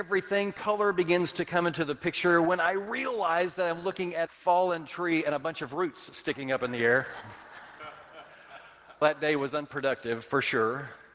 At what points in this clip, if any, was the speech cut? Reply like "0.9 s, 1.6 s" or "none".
4.3 s, 9.0 s